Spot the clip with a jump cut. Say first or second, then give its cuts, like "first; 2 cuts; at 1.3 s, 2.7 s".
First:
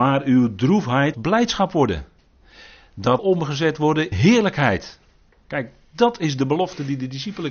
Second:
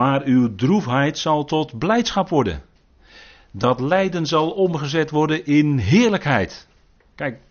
first; 3 cuts; at 1.1 s, 3.2 s, 4.1 s